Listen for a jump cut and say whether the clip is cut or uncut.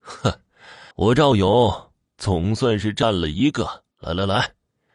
cut